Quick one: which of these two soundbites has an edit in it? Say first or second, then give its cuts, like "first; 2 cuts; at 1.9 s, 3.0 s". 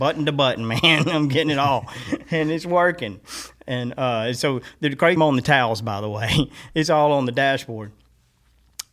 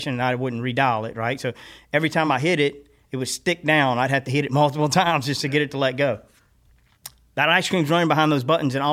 first; 1 cut; at 5.2 s